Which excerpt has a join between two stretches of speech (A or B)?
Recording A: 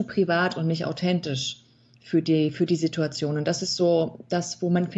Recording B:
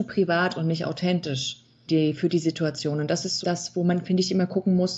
B